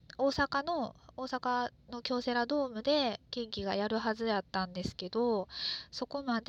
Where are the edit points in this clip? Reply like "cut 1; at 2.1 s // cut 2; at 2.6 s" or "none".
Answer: cut 1; at 4.5 s